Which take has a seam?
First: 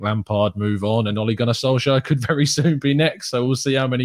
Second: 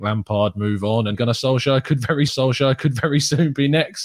second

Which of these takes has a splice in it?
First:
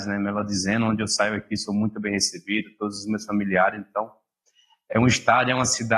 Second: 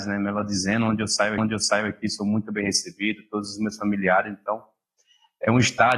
second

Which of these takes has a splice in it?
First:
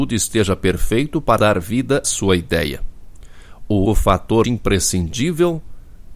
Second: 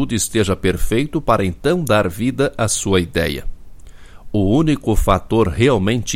first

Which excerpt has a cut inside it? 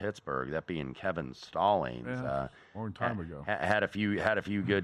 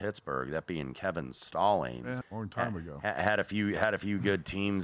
second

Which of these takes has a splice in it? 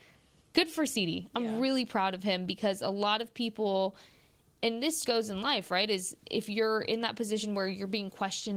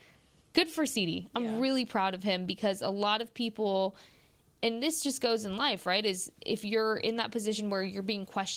first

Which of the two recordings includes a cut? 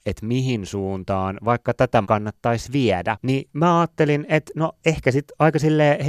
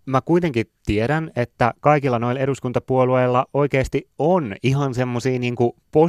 first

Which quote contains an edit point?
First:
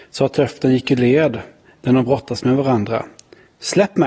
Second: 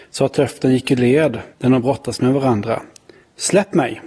second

